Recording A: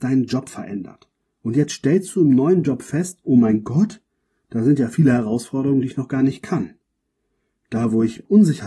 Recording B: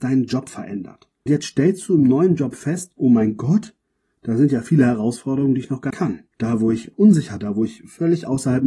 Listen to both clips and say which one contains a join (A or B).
B